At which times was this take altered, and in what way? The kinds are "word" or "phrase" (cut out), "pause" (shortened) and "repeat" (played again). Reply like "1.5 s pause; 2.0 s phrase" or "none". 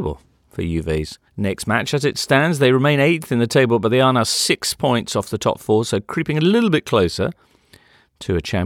1.3 s pause